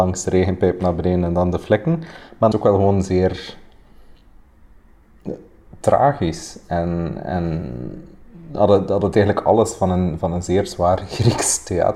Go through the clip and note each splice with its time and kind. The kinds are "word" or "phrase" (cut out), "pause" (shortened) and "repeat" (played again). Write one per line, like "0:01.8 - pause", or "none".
0:02.5 - phrase

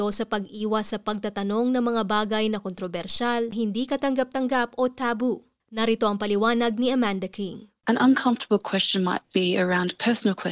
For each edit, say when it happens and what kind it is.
0:07.8 - pause

